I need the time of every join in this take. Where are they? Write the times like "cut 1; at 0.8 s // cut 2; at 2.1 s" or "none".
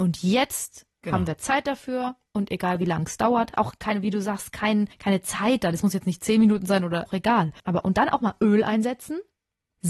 cut 1; at 4.9 s // cut 2; at 7.1 s // cut 3; at 7.6 s